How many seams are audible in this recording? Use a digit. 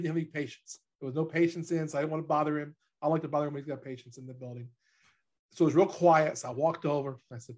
0